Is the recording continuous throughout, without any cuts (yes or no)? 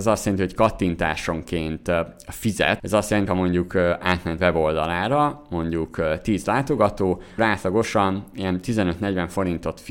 no